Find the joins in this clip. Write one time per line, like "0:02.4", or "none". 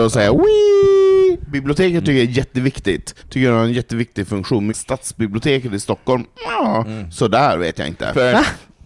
0:03.2
0:04.7